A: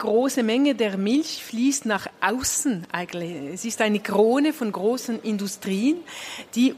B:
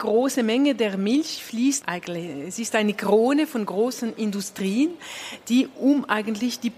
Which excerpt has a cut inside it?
B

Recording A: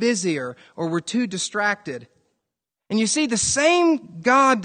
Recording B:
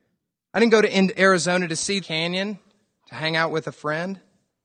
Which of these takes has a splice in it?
B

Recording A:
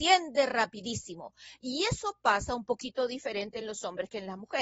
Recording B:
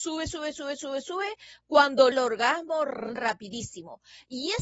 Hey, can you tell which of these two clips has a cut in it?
B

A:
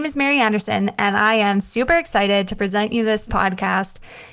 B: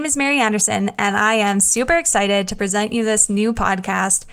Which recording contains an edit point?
A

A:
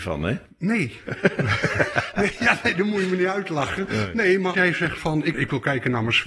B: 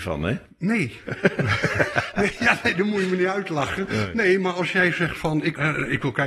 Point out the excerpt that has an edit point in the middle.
A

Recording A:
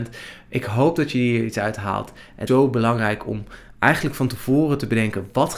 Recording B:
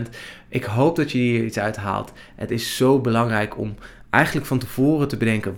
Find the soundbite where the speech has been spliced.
A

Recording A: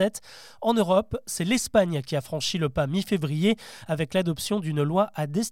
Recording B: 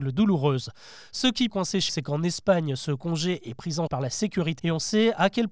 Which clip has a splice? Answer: B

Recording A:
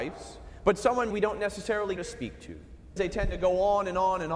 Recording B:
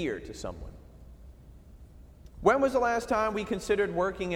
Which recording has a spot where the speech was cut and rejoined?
A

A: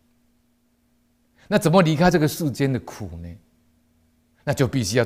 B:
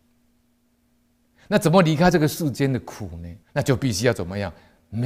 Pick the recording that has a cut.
B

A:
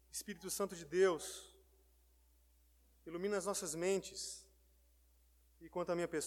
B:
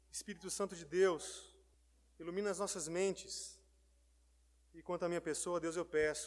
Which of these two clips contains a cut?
B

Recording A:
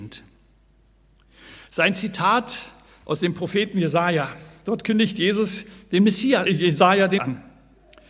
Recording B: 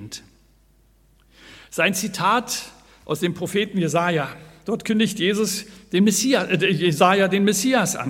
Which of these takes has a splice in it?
A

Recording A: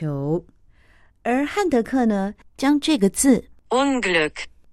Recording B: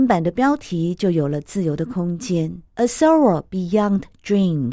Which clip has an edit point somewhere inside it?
B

